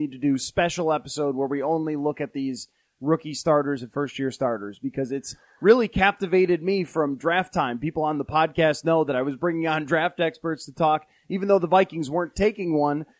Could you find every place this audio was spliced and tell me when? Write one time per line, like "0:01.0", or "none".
none